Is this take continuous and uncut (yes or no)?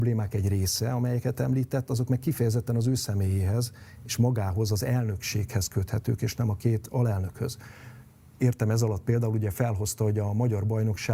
yes